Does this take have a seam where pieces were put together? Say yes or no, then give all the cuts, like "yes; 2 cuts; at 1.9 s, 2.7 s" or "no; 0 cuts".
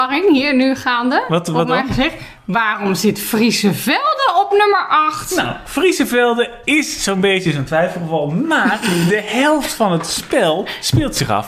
no; 0 cuts